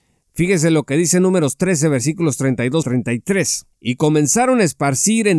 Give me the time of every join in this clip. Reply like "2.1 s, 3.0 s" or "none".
2.8 s, 3.7 s